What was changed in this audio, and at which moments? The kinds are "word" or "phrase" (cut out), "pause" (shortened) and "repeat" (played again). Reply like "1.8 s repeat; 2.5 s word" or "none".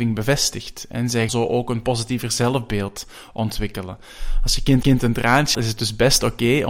1.3 s word; 4.8 s repeat; 5.5 s word

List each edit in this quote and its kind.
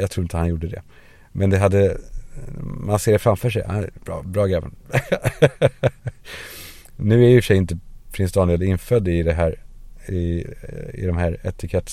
none

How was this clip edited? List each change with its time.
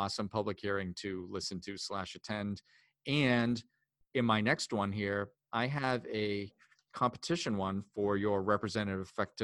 none

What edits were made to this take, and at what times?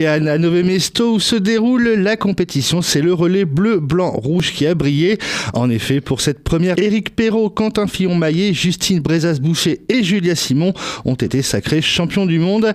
6.7 s word

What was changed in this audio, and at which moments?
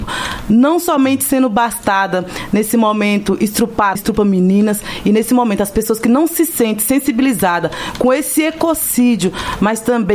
4.0 s word

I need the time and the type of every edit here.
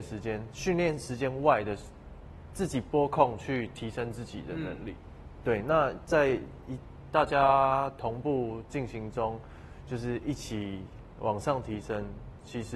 none

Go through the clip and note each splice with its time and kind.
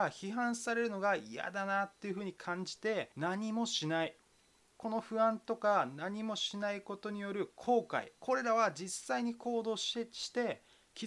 3.1 s pause; 8.2 s pause

